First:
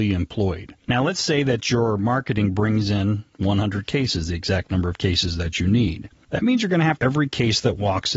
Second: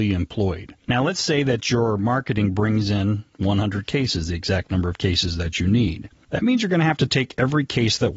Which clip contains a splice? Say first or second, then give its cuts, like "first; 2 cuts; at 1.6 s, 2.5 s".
first; 1 cut; at 7.0 s